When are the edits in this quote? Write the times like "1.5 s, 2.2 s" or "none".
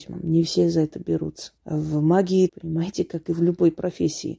1.6 s, 2.5 s